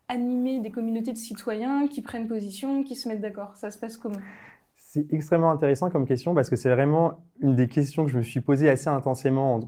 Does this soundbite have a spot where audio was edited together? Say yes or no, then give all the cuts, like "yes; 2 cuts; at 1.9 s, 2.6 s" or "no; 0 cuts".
no; 0 cuts